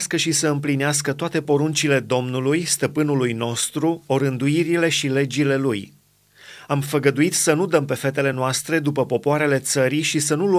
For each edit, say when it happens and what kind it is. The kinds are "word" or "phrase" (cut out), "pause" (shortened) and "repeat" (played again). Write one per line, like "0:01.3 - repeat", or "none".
none